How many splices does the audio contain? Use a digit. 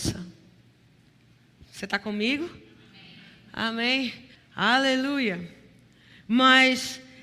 1